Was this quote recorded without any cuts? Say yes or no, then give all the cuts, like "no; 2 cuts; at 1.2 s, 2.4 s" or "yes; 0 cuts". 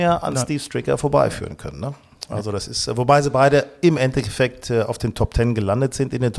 yes; 0 cuts